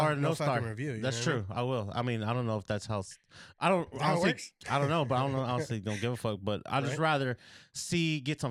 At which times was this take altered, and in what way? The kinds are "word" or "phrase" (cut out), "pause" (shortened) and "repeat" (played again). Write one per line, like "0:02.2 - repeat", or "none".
none